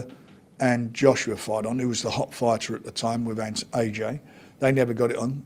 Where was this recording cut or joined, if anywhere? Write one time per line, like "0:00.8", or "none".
none